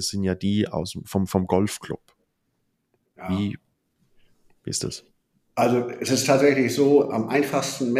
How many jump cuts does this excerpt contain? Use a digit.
0